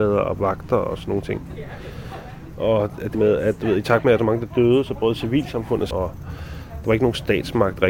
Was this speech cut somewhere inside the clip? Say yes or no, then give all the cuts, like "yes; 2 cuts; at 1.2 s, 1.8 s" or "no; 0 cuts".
yes; 3 cuts; at 3.1 s, 4.2 s, 5.9 s